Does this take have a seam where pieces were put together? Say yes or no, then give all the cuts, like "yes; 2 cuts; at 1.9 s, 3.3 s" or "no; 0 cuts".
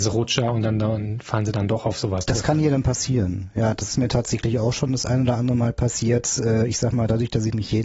no; 0 cuts